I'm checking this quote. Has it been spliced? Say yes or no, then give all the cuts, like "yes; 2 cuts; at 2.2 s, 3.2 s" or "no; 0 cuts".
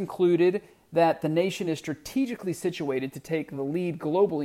no; 0 cuts